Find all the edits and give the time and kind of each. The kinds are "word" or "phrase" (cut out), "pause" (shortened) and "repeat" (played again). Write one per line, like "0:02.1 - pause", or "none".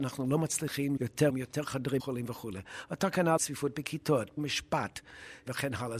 0:01.0 - word
0:01.3 - word
0:02.0 - word
0:03.4 - word
0:04.4 - word

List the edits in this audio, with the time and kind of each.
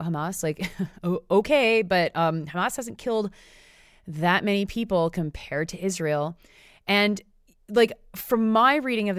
none

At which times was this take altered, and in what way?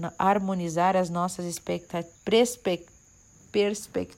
0:02.2 - pause

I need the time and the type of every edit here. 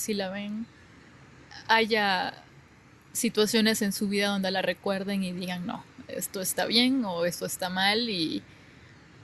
none

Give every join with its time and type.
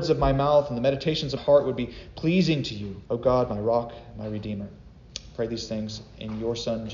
0:01.4 - word
0:03.1 - pause

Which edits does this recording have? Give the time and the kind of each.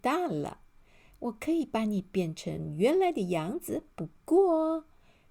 none

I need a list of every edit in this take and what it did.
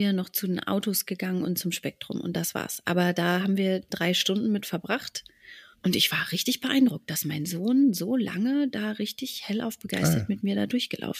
0:05.7 - pause

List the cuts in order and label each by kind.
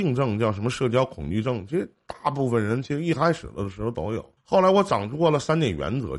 0:04.4 - pause

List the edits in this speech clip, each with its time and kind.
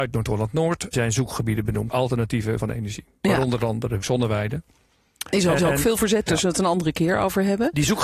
0:00.9 - word
0:01.9 - word
0:02.6 - word
0:04.0 - phrase
0:05.6 - repeat
0:06.3 - phrase

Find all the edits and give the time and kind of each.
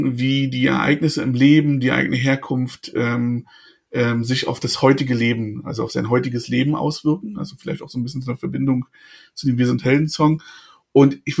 none

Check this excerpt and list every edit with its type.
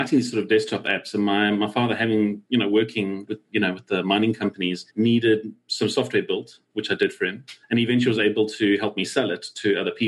0:04.9 - pause
0:07.6 - pause

